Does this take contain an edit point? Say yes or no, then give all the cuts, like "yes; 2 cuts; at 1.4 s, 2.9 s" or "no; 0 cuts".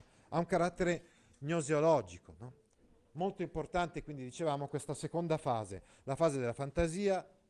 no; 0 cuts